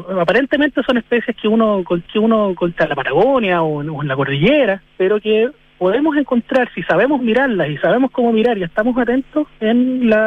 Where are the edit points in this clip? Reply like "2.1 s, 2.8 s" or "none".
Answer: 2.1 s, 4.9 s